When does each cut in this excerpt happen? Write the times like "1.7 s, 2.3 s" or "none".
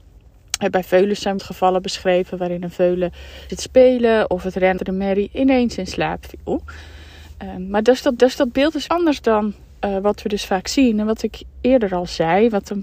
1.4 s, 3.5 s, 4.8 s, 8.2 s, 8.9 s